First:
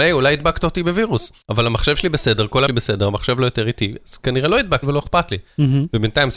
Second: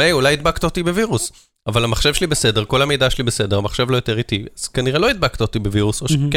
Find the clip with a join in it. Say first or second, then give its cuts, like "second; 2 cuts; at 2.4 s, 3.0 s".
first; 3 cuts; at 1.4 s, 2.7 s, 4.8 s